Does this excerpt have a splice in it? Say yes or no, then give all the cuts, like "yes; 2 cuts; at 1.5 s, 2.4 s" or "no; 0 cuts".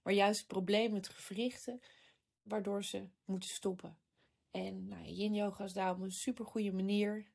no; 0 cuts